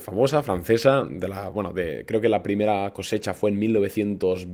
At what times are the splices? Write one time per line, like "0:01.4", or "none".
none